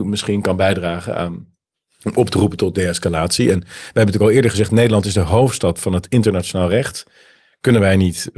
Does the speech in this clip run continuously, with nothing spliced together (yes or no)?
yes